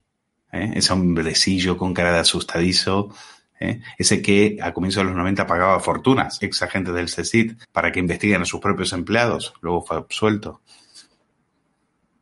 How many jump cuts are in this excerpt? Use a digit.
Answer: 3